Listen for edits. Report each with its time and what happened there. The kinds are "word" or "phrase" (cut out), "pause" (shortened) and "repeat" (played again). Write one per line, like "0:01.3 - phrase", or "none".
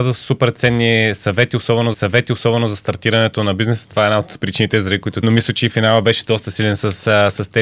0:01.9 - repeat
0:05.2 - phrase